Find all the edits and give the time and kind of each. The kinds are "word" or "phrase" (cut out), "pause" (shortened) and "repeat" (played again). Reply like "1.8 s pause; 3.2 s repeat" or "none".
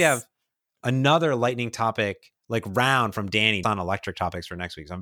2.4 s pause; 3.6 s word